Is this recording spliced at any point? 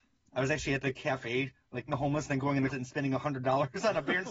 yes; 2 cuts; at 1.9 s, 2.7 s

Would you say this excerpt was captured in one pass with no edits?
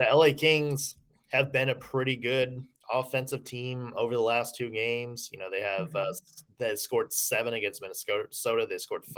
yes; 0 cuts

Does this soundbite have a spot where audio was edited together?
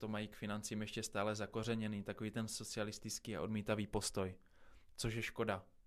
no; 0 cuts

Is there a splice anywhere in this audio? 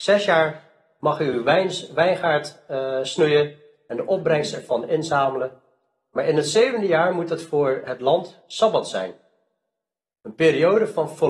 no; 0 cuts

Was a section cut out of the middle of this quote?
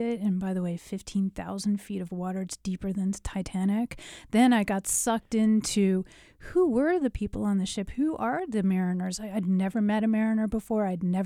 no; 0 cuts

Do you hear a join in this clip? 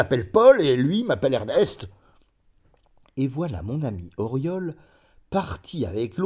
no; 0 cuts

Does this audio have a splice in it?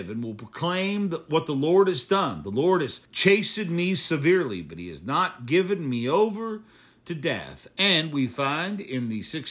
yes; 1 cut; at 3.0 s

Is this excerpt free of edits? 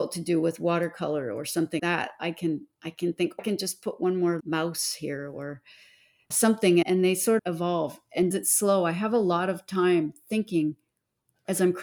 no; 7 cuts; at 1.8 s, 3.4 s, 4.4 s, 6.3 s, 6.8 s, 7.4 s, 8.3 s

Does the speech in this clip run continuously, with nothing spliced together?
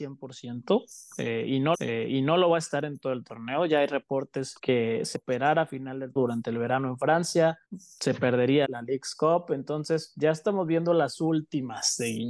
no; 6 cuts; at 1.7 s, 4.6 s, 5.1 s, 6.2 s, 7.6 s, 8.6 s

